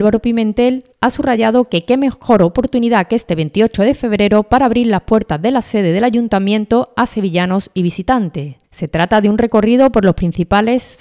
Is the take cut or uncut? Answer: cut